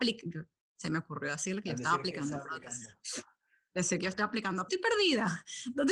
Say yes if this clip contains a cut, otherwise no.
yes